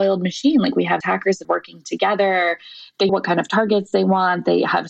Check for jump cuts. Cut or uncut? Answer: cut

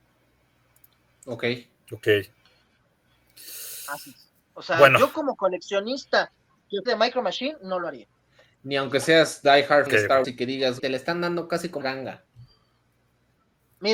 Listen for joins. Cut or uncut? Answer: cut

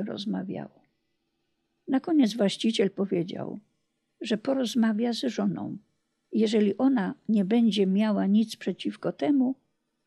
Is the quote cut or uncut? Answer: uncut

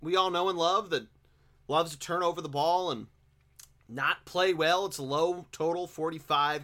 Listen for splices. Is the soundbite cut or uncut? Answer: uncut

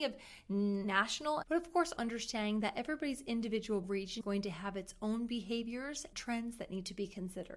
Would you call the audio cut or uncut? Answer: cut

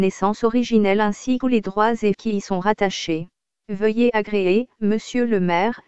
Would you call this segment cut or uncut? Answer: cut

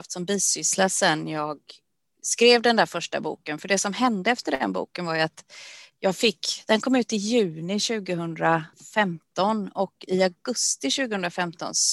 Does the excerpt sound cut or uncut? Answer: cut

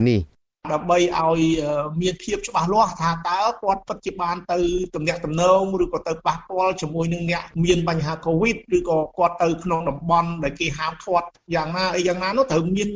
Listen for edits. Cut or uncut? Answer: uncut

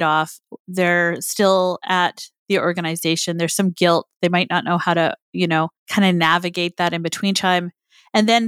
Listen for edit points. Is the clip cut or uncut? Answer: cut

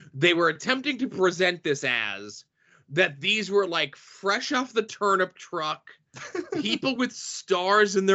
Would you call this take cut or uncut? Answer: uncut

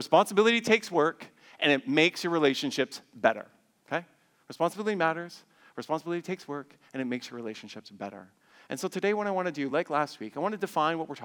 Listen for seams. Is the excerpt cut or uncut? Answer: uncut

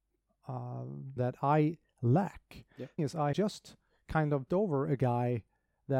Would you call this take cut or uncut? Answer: cut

